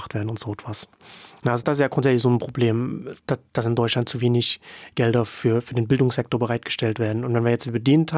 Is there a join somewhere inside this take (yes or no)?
yes